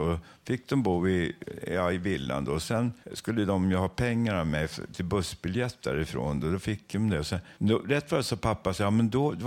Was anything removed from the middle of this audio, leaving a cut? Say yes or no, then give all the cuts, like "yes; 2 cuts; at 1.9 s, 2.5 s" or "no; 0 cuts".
yes; 2 cuts; at 3.0 s, 7.6 s